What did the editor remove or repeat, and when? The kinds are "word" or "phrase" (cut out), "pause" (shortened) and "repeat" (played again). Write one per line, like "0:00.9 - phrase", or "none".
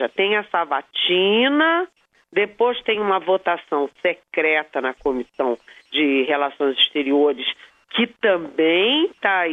none